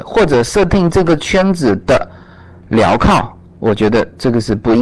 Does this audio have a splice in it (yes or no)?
no